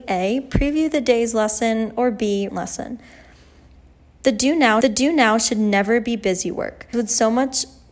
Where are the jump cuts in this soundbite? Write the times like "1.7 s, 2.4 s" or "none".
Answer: 2.5 s, 4.8 s, 6.9 s